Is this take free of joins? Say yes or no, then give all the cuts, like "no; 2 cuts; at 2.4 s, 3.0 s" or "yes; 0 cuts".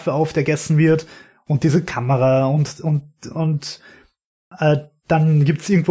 yes; 0 cuts